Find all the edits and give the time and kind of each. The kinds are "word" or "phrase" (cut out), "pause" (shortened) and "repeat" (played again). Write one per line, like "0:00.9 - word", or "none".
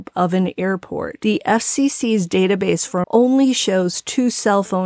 0:03.0 - word